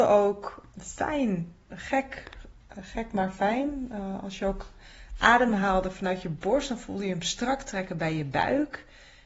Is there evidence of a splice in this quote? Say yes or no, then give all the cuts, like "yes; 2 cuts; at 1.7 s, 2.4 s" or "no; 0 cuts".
no; 0 cuts